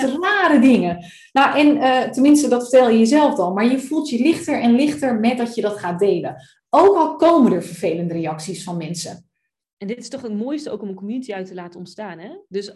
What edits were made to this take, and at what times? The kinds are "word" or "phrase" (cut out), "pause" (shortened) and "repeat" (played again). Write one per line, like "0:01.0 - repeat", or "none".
none